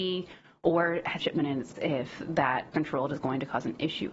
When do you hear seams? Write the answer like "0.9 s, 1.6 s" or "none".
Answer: 1.2 s, 1.7 s, 2.7 s